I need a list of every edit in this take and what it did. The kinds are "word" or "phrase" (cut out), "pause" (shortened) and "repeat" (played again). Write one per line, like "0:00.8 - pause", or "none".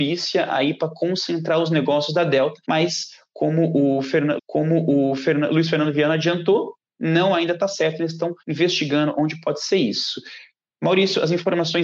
0:02.6 - pause
0:04.4 - repeat
0:08.4 - pause

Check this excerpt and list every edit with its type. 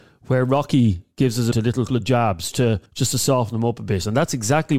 0:01.5 - word
0:01.9 - word
0:02.5 - word
0:02.9 - pause

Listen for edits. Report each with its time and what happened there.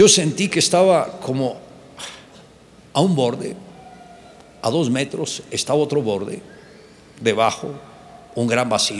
none

